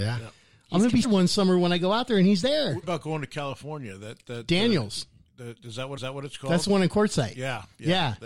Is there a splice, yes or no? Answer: yes